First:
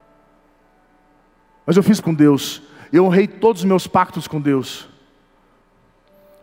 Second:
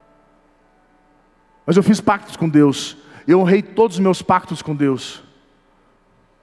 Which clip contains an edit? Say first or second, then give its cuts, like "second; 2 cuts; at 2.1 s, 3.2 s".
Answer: first; 1 cut; at 2.0 s